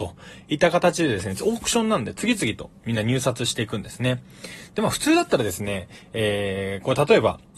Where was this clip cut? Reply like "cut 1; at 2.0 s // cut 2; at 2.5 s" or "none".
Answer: none